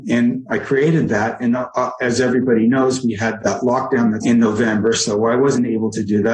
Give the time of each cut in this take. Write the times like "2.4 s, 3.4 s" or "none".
3.4 s, 4.2 s